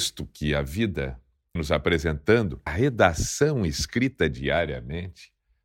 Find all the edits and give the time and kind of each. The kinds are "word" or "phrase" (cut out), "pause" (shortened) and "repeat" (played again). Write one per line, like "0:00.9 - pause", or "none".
0:01.6 - word
0:02.7 - word